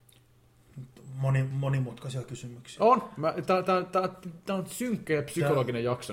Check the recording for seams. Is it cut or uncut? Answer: uncut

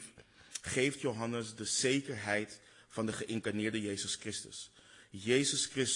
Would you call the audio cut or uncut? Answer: uncut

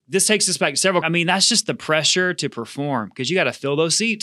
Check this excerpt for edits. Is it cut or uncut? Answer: cut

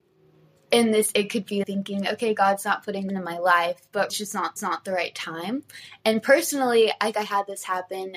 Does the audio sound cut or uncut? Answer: cut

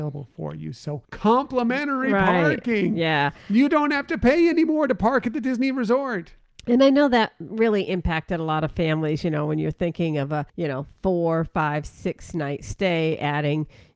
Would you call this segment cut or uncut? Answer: cut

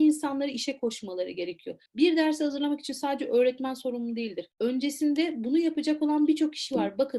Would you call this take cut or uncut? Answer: cut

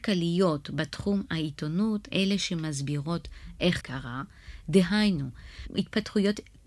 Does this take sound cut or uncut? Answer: cut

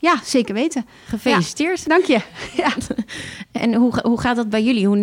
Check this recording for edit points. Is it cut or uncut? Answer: cut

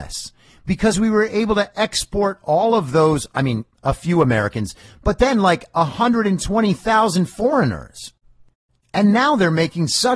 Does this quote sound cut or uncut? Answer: uncut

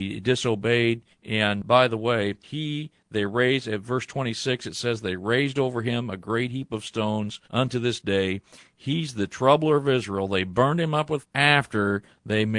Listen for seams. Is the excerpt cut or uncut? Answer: cut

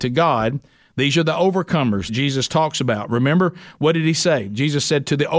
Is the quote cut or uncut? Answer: cut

